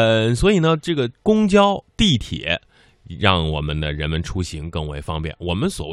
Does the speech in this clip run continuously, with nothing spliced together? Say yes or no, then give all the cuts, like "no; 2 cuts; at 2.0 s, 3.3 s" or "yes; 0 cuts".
no; 2 cuts; at 1.1 s, 1.9 s